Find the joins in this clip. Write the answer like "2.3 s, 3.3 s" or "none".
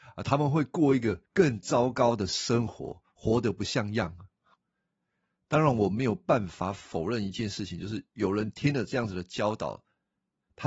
1.3 s